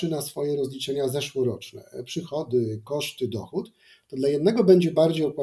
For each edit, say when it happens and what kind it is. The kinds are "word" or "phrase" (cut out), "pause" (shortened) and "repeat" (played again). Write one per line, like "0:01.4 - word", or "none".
none